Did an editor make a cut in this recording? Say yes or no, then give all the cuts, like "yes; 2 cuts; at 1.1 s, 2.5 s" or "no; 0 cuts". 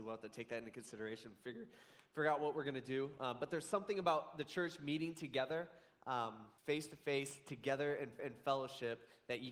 yes; 2 cuts; at 6.6 s, 8.2 s